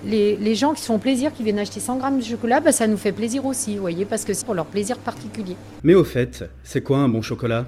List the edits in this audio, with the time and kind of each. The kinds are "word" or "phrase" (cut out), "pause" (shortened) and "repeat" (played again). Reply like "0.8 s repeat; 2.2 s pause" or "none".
4.4 s word